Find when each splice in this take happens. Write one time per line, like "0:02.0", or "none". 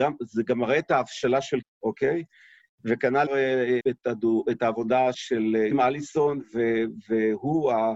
0:01.6
0:03.3
0:03.8
0:05.1
0:05.7